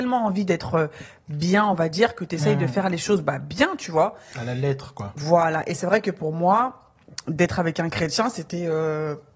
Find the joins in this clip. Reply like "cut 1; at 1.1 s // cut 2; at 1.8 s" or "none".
none